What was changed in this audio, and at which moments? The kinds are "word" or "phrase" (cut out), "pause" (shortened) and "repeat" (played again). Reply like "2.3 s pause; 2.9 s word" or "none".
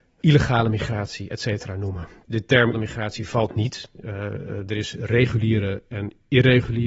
2.7 s word